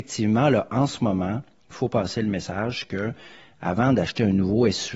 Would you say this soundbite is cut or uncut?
uncut